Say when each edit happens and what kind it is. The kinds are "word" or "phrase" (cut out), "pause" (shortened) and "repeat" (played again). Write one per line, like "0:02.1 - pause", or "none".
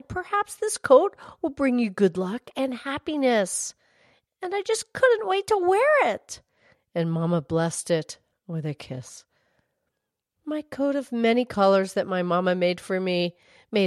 none